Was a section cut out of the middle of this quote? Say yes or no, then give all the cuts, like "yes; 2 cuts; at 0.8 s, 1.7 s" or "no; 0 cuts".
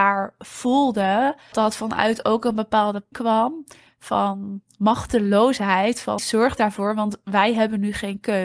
yes; 3 cuts; at 1.5 s, 3.1 s, 6.2 s